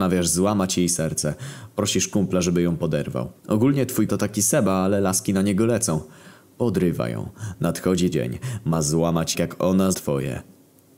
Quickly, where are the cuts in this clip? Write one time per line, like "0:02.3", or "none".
0:03.4
0:04.1
0:08.1
0:09.3
0:09.9